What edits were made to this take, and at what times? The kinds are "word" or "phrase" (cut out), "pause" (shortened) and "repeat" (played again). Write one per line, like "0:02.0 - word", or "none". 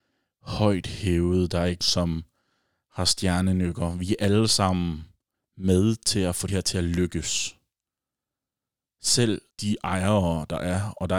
0:01.8 - word
0:05.3 - pause
0:06.5 - word
0:09.5 - pause